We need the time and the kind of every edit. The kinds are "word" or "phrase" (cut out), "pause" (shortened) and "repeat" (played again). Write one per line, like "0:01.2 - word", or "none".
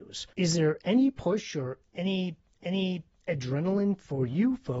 0:02.5 - repeat

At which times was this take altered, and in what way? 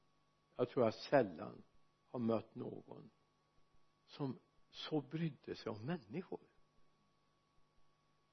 none

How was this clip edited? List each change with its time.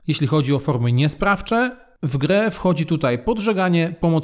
none

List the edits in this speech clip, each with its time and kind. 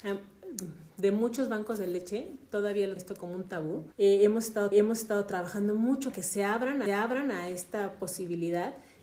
0:03.0 - word
0:03.9 - pause
0:04.7 - repeat
0:06.1 - word
0:06.9 - repeat

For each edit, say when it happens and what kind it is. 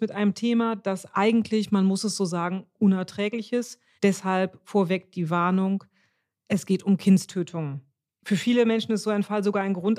0:04.0 - pause

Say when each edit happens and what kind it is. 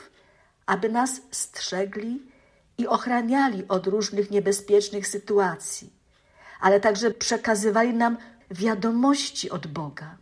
0:07.1 - word
0:08.4 - word

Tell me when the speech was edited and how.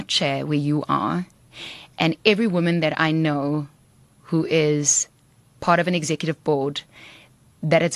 none

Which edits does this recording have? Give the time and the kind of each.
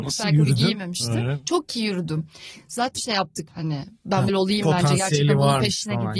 0:03.0 - word
0:03.5 - word
0:04.3 - word

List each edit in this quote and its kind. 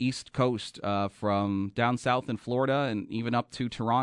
none

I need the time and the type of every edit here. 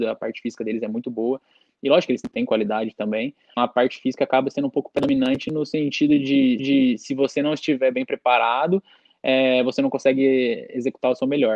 0:02.2 - word
0:03.6 - word
0:06.6 - repeat

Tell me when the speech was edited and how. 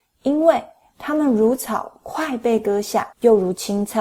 0:03.1 - pause

